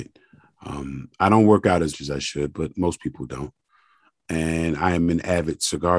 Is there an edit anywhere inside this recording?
yes; 1 cut; at 1.9 s

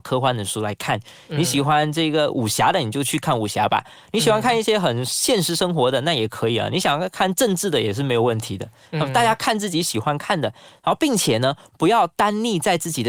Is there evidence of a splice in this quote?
no; 0 cuts

